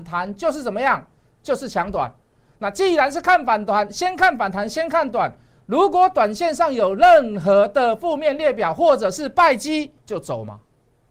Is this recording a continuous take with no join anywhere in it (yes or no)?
no